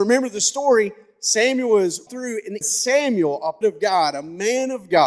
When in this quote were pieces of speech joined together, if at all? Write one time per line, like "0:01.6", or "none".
0:02.1
0:02.6
0:03.6